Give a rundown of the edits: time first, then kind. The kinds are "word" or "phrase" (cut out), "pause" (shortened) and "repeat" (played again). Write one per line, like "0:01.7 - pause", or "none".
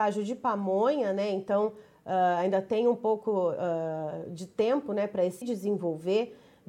0:05.4 - phrase